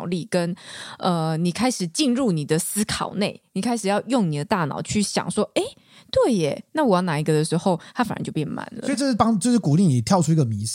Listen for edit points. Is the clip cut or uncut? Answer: uncut